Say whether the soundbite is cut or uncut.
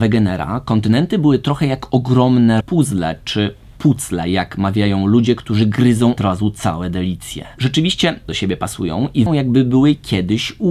cut